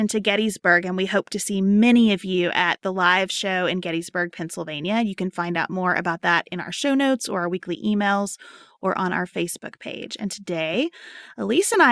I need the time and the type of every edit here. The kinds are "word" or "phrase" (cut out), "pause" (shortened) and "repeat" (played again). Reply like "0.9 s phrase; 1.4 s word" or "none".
none